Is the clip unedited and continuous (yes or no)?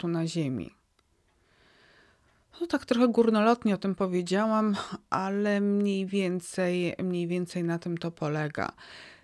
yes